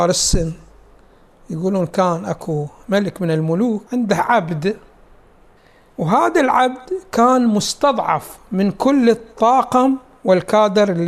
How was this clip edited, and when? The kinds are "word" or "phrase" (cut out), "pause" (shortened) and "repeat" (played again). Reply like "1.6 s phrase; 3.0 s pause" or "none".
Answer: 3.9 s pause; 5.6 s pause